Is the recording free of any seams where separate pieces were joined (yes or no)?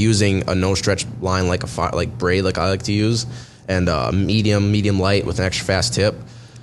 yes